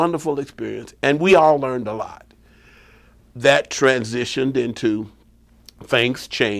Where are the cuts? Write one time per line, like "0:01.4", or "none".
none

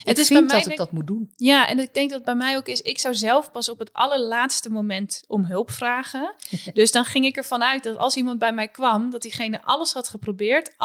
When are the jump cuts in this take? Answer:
none

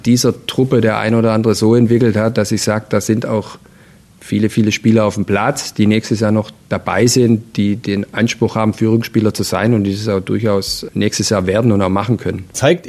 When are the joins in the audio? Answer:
none

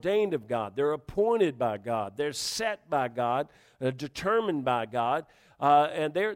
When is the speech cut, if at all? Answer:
none

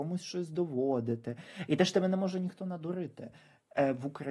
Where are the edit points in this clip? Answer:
none

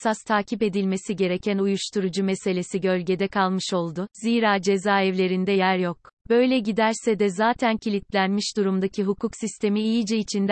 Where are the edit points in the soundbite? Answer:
0:06.2

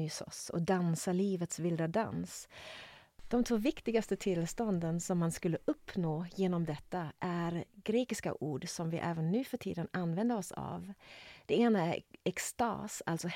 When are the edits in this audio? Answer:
none

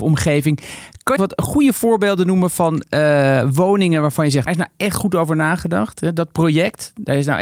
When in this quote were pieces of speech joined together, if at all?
0:01.2
0:04.5

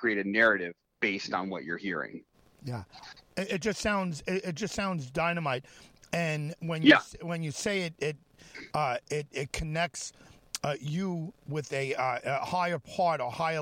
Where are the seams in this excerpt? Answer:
0:02.3

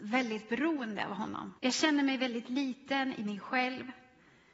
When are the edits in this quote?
0:01.6

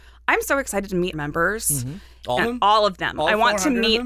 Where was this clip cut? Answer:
0:01.1
0:02.4

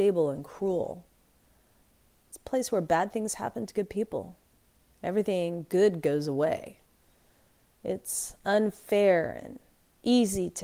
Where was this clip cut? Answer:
none

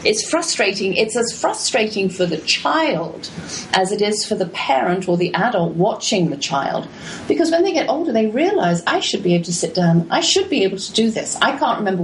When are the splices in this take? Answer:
none

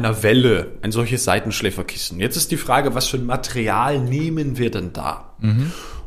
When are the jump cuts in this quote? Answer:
none

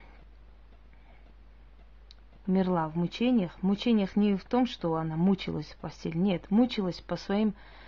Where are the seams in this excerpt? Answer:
none

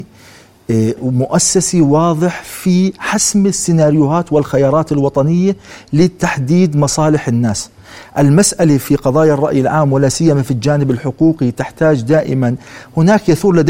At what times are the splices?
none

